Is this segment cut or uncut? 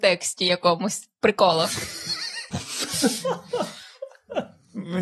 uncut